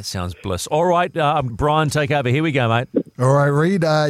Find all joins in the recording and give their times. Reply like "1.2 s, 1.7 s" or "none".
1.5 s